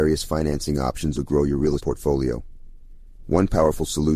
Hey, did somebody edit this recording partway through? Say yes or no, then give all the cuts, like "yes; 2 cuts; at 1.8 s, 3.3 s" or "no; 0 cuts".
yes; 2 cuts; at 1.1 s, 1.8 s